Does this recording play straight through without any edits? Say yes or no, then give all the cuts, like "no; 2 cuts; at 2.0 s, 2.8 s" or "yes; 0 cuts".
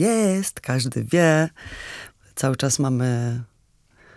yes; 0 cuts